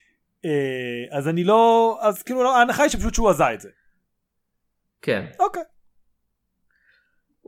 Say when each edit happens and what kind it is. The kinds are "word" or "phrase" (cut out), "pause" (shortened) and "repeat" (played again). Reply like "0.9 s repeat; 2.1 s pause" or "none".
none

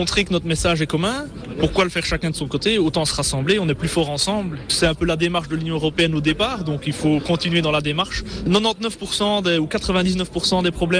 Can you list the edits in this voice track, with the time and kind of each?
none

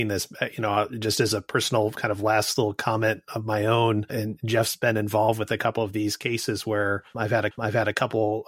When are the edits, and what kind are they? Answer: 7.5 s repeat

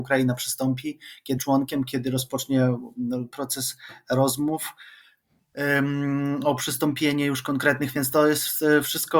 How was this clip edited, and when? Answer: 1.4 s word

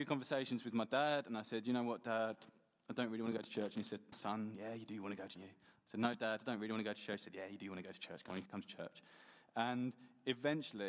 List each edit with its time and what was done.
4.1 s word; 5.4 s phrase; 8.5 s word

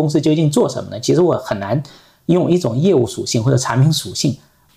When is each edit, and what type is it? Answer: none

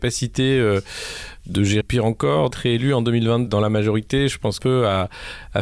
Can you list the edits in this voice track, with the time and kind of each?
1.8 s phrase; 2.5 s word; 3.5 s word; 4.6 s phrase

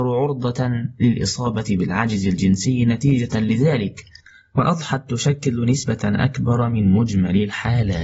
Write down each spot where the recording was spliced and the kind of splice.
none

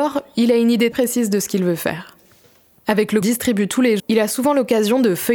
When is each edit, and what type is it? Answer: 0.9 s word; 3.2 s phrase; 4.0 s word

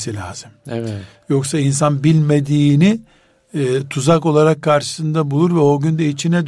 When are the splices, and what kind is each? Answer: none

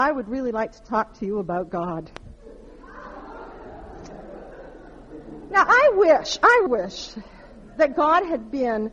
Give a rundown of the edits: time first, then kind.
6.7 s word

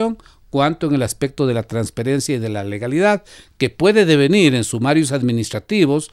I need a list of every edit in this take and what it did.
none

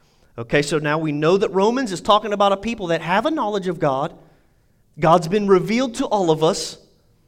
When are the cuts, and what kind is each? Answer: none

